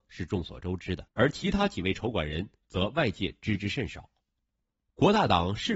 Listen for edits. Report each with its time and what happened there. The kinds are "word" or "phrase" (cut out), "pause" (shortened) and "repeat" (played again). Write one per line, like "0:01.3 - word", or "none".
0:01.1 - pause